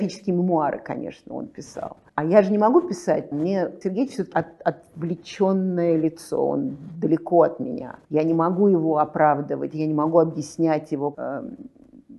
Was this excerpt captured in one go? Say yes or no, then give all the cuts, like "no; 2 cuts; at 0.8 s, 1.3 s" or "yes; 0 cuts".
no; 6 cuts; at 2.1 s, 3.3 s, 3.8 s, 4.3 s, 8.0 s, 11.1 s